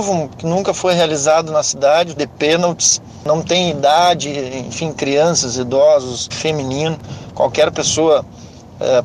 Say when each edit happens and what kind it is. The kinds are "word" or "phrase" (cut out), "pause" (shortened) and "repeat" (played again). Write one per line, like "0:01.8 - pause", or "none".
0:02.2 - word
0:06.3 - word